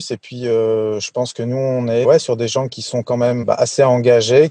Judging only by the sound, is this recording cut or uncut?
cut